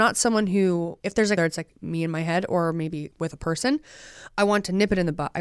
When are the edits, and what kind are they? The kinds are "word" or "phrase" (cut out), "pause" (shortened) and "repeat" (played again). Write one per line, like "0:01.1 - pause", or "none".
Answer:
0:01.0 - pause
0:01.4 - phrase
0:03.1 - word